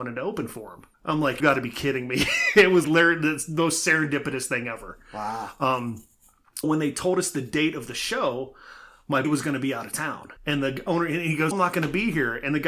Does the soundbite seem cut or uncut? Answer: cut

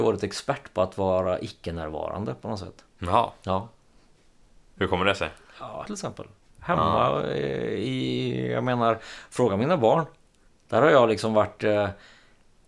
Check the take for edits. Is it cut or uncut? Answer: cut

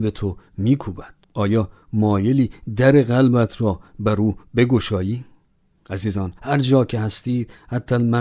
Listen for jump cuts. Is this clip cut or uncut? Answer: cut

